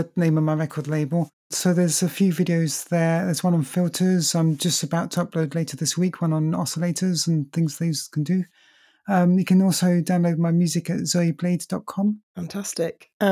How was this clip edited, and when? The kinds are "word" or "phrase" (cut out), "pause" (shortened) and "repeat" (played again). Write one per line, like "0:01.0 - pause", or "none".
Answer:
none